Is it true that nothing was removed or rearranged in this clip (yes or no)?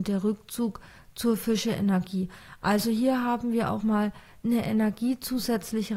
no